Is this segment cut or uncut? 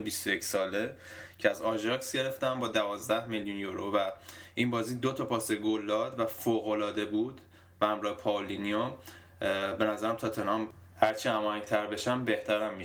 uncut